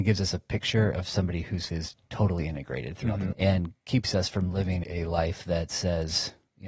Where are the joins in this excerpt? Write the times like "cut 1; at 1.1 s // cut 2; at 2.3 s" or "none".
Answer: cut 1; at 1.7 s // cut 2; at 3.3 s // cut 3; at 4.8 s